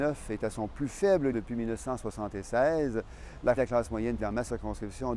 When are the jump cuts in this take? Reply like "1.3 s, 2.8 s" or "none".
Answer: 1.3 s, 3.6 s, 4.2 s